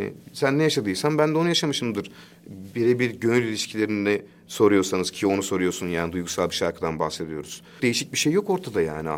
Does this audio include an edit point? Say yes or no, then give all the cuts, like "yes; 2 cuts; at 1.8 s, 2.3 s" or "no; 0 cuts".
yes; 1 cut; at 7.8 s